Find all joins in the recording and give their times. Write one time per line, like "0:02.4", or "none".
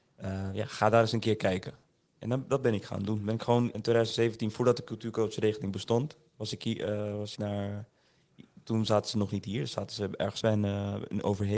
0:03.7
0:07.4
0:10.4

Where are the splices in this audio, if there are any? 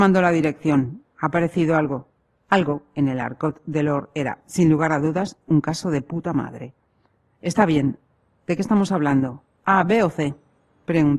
none

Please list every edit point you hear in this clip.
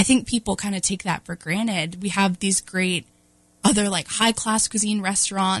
0:03.6

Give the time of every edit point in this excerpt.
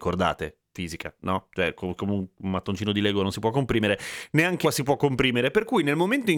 0:02.0
0:04.6

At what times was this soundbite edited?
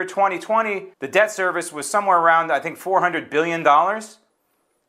0:00.9

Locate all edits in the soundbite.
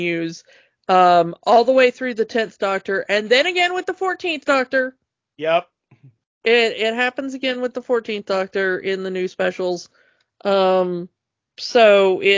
none

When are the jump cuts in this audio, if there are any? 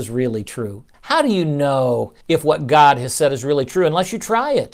0:00.9
0:02.2

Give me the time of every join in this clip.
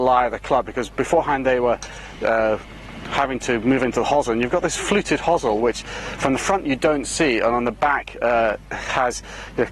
none

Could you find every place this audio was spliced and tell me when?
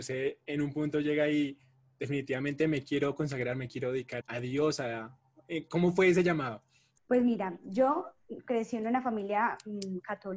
0:04.2

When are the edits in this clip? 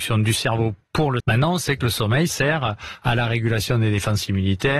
0:01.2
0:02.3

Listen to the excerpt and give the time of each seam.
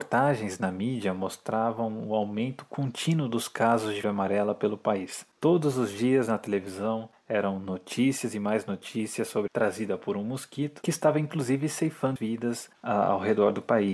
0:04.0
0:09.5
0:10.8
0:12.2

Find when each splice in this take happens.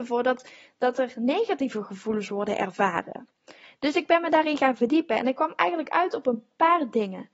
none

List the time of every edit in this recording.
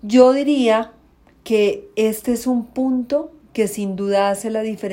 none

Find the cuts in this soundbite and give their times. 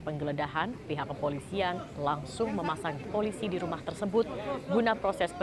0:03.0

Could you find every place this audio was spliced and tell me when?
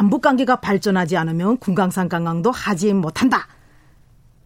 none

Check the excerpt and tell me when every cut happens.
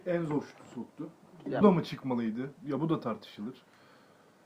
0:01.6
0:02.6

